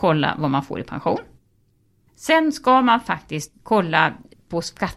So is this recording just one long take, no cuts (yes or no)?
yes